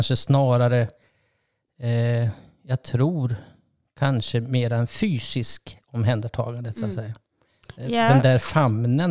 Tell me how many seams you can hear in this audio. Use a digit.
0